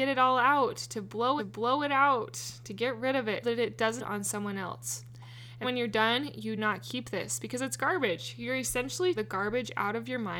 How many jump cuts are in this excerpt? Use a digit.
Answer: 6